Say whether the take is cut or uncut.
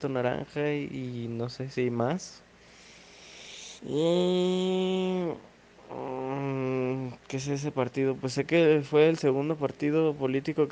cut